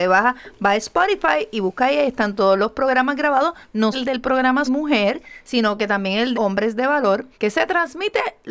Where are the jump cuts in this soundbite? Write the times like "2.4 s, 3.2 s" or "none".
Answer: 3.9 s, 4.7 s, 6.3 s, 7.3 s